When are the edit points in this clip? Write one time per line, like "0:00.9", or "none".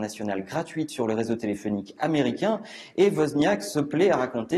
none